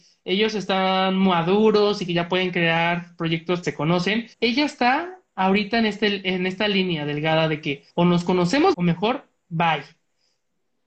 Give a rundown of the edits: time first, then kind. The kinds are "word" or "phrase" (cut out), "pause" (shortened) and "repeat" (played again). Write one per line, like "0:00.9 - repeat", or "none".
0:03.6 - word
0:04.3 - pause
0:07.9 - pause
0:08.7 - word